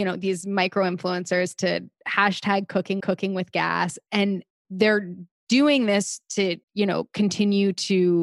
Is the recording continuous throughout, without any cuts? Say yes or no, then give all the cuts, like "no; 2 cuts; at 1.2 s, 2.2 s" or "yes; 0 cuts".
no; 3 cuts; at 3.0 s, 4.5 s, 6.6 s